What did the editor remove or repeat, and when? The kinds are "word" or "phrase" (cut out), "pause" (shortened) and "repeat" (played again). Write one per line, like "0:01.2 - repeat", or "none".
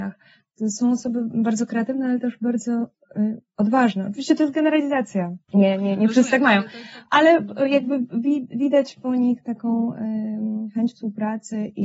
none